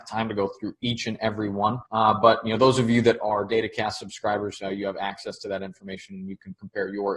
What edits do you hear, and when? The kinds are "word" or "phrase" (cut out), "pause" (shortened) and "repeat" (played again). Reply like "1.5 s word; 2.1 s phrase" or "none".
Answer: 1.9 s pause